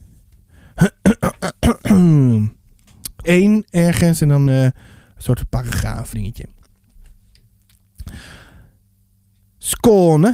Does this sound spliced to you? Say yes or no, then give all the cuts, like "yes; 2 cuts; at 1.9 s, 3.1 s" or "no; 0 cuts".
yes; 3 cuts; at 3.2 s, 4.5 s, 6.1 s